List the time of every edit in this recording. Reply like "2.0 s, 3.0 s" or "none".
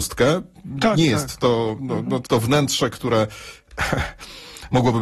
2.3 s